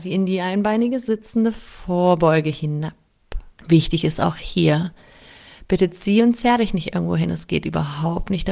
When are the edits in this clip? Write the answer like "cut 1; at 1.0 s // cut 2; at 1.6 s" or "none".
cut 1; at 3.6 s